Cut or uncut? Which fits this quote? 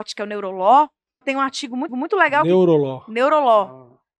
cut